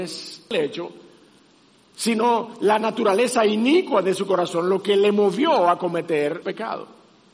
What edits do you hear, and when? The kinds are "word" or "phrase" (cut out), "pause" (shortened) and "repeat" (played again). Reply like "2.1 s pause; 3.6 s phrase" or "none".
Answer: 6.4 s word